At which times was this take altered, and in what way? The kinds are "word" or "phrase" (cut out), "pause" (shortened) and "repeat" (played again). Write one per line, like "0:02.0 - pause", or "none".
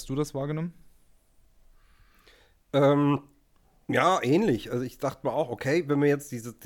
0:03.6 - pause